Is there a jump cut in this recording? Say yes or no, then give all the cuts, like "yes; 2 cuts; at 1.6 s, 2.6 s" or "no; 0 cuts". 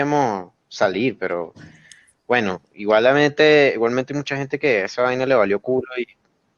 no; 0 cuts